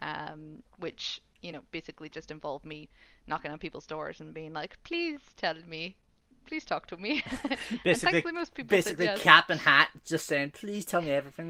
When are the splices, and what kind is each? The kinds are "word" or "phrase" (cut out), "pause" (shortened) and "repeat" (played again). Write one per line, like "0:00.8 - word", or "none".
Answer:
none